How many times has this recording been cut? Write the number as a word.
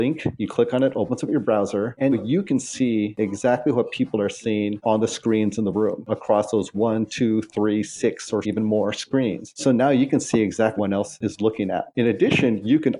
three